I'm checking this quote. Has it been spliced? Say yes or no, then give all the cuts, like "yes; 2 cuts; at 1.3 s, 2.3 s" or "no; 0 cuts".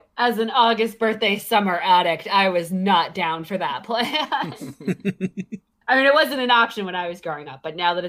no; 0 cuts